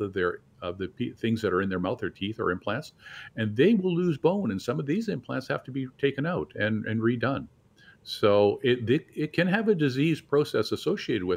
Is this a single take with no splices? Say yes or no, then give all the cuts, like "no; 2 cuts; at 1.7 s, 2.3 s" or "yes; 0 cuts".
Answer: yes; 0 cuts